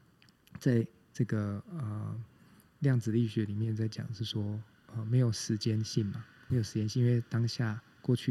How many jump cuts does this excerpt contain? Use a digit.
1